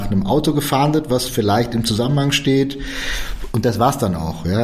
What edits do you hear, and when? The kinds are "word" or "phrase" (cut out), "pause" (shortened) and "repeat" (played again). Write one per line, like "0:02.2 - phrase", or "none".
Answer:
none

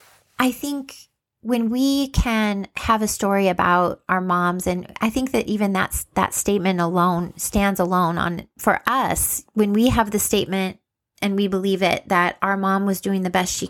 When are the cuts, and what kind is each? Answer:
none

